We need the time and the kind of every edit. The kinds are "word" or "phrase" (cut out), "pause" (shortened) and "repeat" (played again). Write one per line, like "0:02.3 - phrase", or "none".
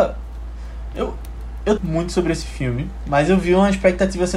0:01.8 - phrase